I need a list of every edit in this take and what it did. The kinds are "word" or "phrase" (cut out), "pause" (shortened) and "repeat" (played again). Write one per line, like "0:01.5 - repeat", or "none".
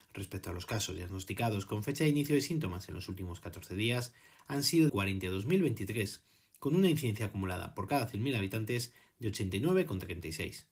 0:04.9 - word